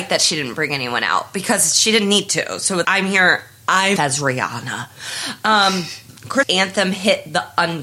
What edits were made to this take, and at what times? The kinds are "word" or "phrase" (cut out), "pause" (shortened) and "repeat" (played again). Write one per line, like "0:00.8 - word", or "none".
0:02.8 - word
0:04.0 - word
0:06.4 - word